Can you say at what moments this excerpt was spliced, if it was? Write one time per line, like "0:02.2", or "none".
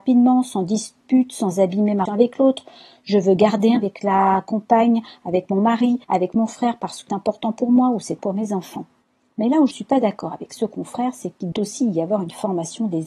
0:02.1
0:03.8
0:06.0
0:07.1
0:08.2
0:09.0
0:09.7
0:11.5